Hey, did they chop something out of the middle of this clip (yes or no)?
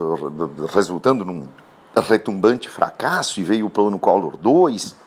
no